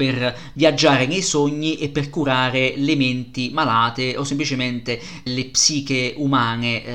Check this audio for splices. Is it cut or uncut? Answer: cut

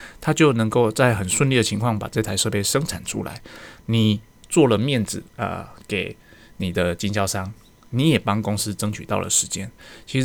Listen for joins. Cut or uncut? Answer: uncut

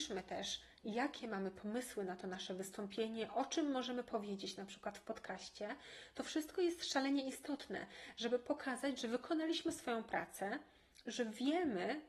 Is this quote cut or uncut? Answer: uncut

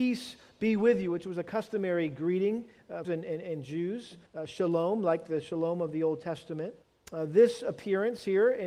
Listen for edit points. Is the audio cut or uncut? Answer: cut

